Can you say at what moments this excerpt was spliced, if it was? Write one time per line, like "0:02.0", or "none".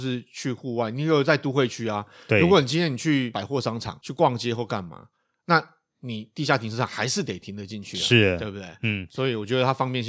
none